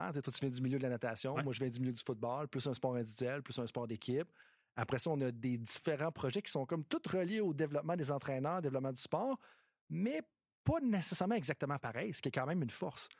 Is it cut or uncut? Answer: uncut